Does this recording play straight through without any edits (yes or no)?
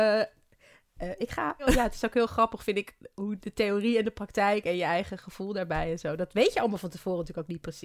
yes